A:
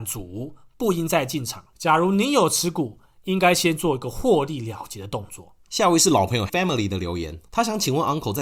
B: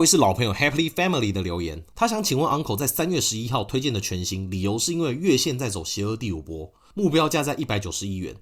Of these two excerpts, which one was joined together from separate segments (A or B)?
A